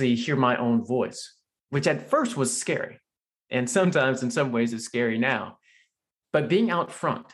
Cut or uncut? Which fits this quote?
uncut